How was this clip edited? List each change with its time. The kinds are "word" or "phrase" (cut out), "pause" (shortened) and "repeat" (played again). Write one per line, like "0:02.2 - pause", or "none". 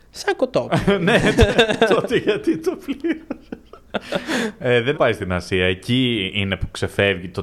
0:04.9 - word

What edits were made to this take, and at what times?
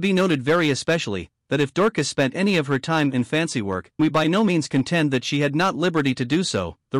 0:04.0 - word

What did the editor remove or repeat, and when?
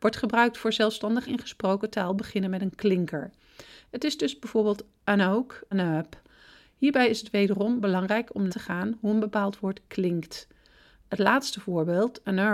0:01.3 - phrase
0:05.7 - phrase
0:08.5 - word

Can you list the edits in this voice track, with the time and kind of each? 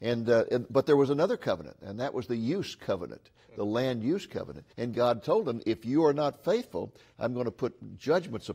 0:04.7 - pause

